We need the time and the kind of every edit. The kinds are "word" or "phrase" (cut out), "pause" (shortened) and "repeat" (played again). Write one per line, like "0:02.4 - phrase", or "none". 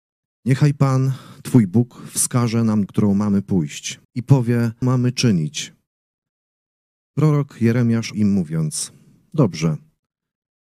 0:02.9 - word
0:04.0 - pause
0:04.8 - word
0:08.1 - word